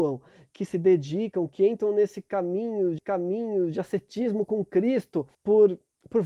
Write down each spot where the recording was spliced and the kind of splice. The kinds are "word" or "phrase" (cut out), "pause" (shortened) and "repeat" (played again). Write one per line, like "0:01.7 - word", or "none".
0:03.0 - repeat
0:05.3 - pause